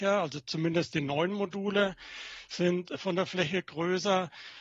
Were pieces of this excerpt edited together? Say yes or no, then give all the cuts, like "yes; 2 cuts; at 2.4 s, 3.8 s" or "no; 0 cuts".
no; 0 cuts